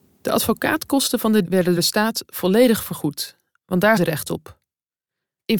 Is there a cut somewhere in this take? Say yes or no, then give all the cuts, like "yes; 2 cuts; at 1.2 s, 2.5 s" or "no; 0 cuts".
yes; 3 cuts; at 1.5 s, 1.8 s, 4.0 s